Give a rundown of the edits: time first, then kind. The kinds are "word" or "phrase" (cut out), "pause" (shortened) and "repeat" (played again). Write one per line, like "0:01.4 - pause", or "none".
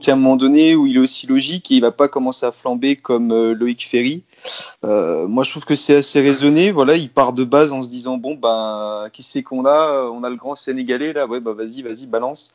0:04.7 - pause